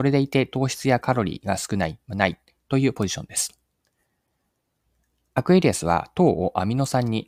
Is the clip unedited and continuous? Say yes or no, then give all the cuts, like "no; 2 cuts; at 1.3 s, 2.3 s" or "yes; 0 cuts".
yes; 0 cuts